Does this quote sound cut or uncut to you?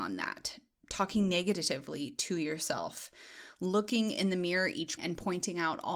cut